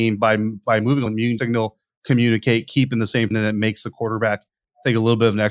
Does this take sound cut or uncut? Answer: cut